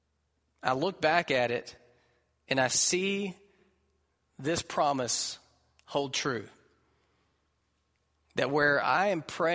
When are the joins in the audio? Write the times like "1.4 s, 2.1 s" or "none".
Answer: none